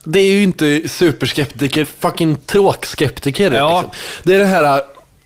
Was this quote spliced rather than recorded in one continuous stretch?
yes; 1 cut; at 1.8 s

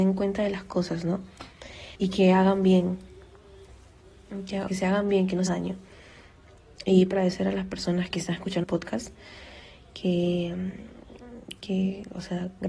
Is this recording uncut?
no; 6 cuts; at 1.9 s, 4.7 s, 5.5 s, 7.1 s, 8.1 s, 8.6 s

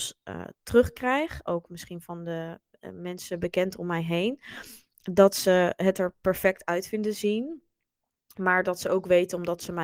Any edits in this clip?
no; 0 cuts

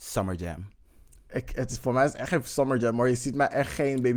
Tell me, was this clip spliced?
no; 0 cuts

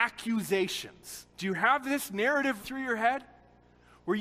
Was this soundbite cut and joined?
yes; 2 cuts; at 1.3 s, 2.6 s

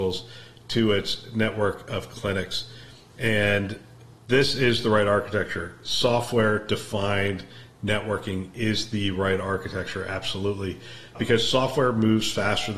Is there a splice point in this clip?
no; 0 cuts

